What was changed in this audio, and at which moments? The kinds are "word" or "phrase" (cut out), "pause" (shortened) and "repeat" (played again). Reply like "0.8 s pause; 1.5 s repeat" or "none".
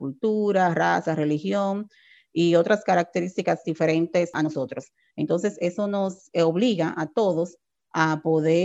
none